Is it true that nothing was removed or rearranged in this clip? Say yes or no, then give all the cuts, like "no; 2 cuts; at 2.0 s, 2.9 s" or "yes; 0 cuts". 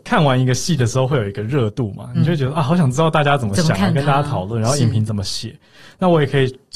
yes; 0 cuts